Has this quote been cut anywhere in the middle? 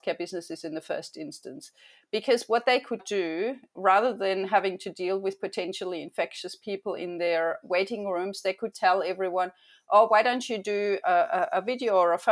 yes; 4 cuts; at 3.0 s, 7.6 s, 8.7 s, 11.0 s

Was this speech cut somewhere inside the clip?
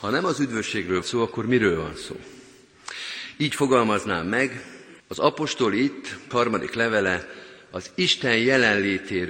yes; 3 cuts; at 1.0 s, 5.0 s, 6.3 s

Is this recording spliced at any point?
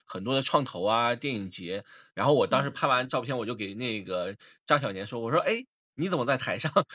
no; 0 cuts

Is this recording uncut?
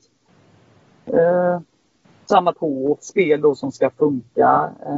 no; 2 cuts; at 2.5 s, 3.0 s

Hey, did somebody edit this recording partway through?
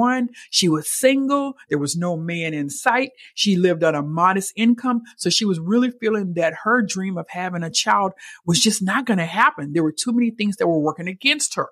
no; 0 cuts

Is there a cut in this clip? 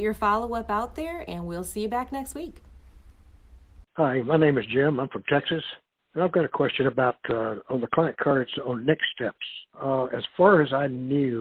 yes; 3 cuts; at 3.9 s, 6.0 s, 9.7 s

